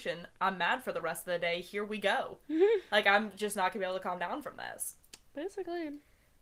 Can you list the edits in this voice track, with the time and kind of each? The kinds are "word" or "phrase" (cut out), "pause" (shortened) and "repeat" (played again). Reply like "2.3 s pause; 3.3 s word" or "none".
none